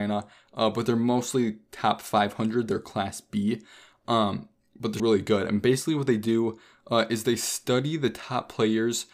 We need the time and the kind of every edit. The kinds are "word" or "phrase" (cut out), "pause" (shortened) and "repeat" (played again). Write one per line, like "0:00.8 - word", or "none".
0:05.0 - word